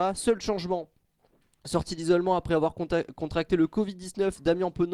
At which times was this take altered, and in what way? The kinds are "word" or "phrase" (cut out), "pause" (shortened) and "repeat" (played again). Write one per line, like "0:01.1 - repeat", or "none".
none